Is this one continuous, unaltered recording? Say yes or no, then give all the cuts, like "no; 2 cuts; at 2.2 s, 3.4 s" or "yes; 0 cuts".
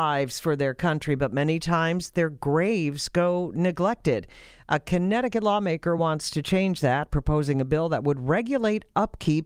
yes; 0 cuts